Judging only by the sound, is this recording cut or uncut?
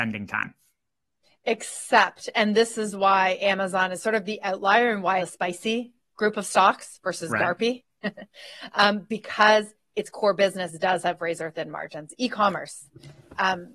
cut